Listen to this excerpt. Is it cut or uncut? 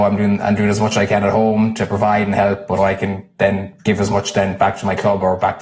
cut